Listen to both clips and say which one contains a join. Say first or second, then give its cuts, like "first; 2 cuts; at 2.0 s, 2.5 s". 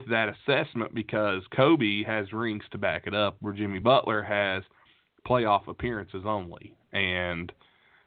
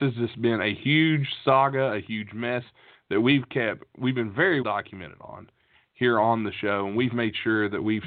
second; 1 cut; at 4.6 s